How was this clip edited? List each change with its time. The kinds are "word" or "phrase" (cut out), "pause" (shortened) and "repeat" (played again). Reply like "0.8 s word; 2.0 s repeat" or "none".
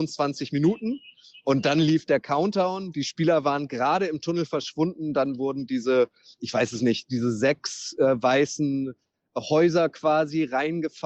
none